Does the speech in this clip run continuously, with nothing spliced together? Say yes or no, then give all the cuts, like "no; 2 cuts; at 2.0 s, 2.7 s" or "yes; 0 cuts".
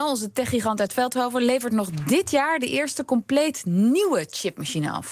yes; 0 cuts